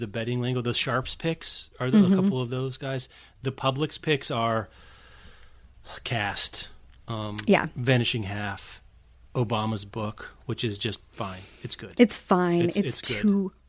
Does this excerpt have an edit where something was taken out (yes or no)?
no